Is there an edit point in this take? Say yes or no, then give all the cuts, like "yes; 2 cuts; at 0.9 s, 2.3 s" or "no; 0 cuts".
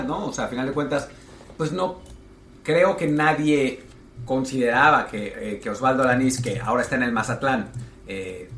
no; 0 cuts